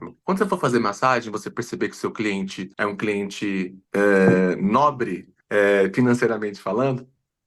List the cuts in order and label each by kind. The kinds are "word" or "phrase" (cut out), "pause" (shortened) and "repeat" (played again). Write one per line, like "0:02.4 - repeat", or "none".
0:02.7 - pause
0:03.8 - pause
0:05.4 - pause